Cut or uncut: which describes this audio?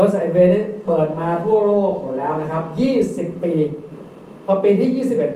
uncut